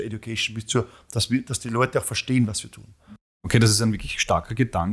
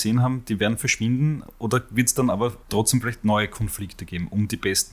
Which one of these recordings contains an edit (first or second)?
second